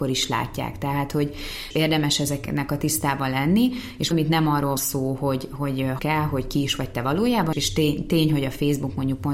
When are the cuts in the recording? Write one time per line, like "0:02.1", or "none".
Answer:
0:01.7
0:04.1
0:04.8
0:06.0
0:07.5